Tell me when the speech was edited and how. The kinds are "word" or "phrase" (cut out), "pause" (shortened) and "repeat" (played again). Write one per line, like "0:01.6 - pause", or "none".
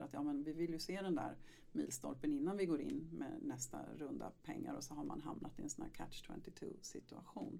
none

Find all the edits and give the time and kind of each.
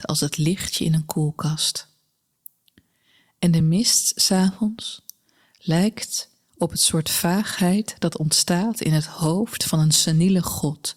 none

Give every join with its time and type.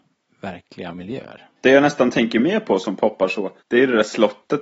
0:01.6 - pause
0:03.6 - pause

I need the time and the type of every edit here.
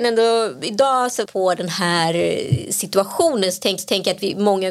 0:01.2 - word
0:03.8 - repeat

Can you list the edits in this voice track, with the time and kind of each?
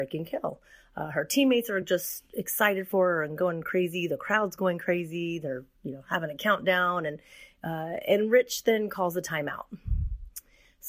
none

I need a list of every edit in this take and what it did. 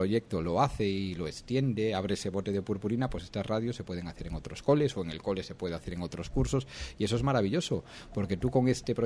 none

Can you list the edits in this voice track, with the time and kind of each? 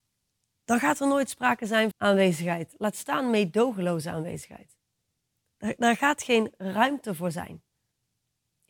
0:01.9 - word

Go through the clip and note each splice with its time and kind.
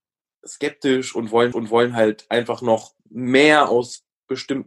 0:01.5 - repeat
0:03.0 - pause

